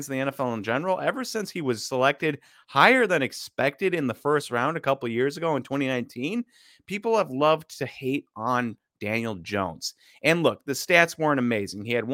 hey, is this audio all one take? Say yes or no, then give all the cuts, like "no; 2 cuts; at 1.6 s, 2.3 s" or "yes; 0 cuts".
yes; 0 cuts